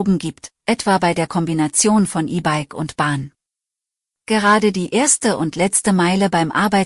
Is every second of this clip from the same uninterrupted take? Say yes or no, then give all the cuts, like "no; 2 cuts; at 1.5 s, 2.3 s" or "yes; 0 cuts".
yes; 0 cuts